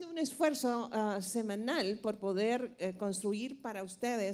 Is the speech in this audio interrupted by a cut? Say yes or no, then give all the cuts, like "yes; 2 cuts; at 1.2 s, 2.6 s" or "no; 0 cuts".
no; 0 cuts